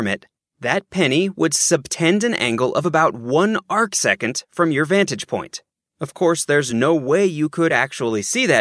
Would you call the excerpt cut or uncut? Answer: uncut